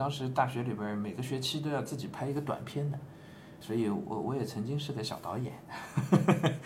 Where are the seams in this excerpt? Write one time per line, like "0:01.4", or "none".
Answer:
0:03.6